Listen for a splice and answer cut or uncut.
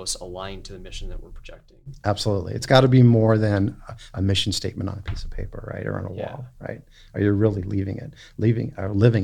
uncut